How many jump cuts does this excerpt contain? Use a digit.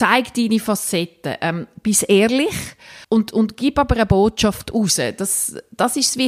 1